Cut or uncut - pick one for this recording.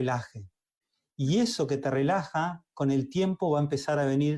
uncut